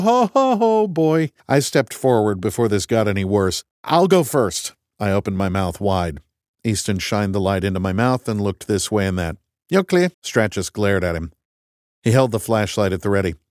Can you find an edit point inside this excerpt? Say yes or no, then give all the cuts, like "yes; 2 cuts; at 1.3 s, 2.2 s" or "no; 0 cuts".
yes; 3 cuts; at 1.4 s, 3.7 s, 10.1 s